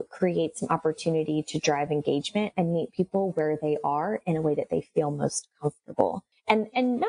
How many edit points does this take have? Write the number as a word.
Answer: zero